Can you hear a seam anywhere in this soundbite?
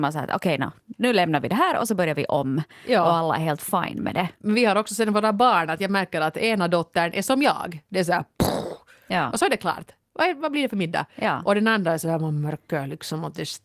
no; 0 cuts

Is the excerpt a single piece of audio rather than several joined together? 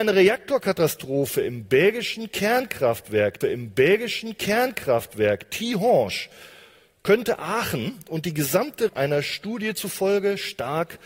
no; 2 cuts; at 3.4 s, 8.9 s

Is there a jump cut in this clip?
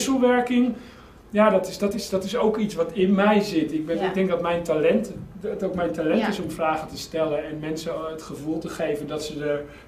no; 0 cuts

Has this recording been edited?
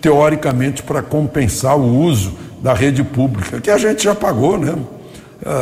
no; 0 cuts

